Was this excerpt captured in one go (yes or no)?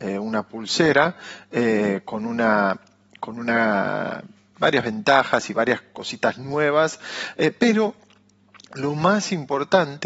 yes